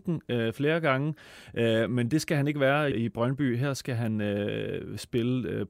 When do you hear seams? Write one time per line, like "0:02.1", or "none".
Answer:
0:02.9